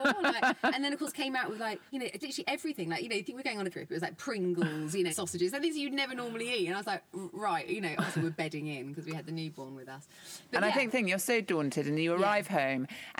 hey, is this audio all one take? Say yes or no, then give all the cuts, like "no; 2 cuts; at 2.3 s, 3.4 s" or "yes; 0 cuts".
no; 5 cuts; at 1.9 s, 2.2 s, 3.7 s, 5.1 s, 10.9 s